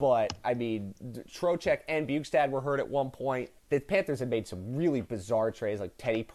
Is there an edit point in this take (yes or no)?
yes